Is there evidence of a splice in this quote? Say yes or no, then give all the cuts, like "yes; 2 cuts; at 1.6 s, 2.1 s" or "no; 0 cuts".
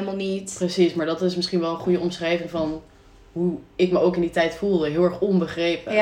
no; 0 cuts